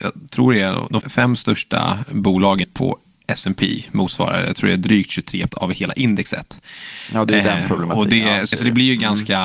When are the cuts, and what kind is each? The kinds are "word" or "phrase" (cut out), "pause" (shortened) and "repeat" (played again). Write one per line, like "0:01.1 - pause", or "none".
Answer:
0:01.0 - word
0:02.6 - word
0:05.5 - word
0:08.5 - word